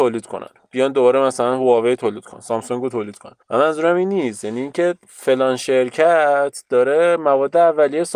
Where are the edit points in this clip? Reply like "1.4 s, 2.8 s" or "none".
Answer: 3.4 s, 5.0 s